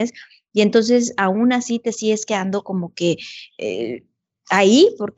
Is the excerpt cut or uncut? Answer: uncut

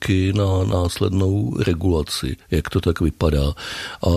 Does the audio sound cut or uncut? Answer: cut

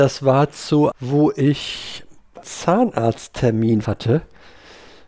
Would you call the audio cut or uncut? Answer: cut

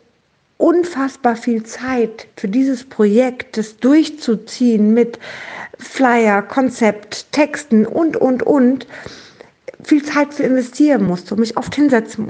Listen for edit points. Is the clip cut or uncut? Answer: uncut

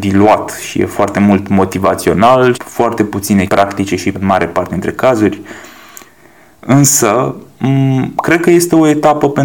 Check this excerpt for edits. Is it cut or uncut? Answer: cut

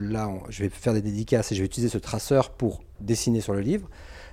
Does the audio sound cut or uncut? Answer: uncut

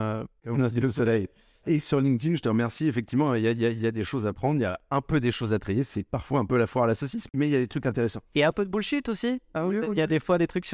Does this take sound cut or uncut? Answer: uncut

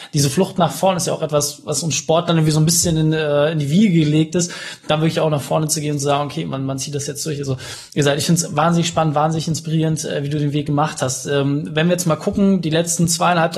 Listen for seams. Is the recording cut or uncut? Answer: uncut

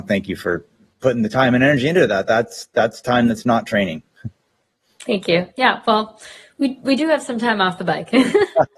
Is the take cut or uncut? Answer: uncut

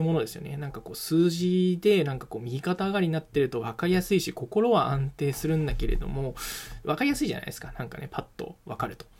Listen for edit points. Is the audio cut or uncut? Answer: cut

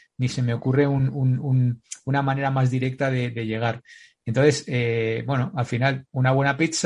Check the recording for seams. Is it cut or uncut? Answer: uncut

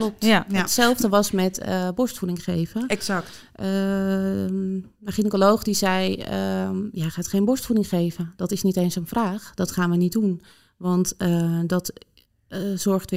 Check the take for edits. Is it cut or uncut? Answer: uncut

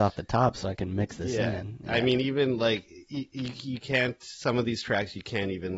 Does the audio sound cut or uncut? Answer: uncut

